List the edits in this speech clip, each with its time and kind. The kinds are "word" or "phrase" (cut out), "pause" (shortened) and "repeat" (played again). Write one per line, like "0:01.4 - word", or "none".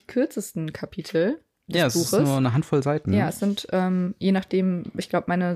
none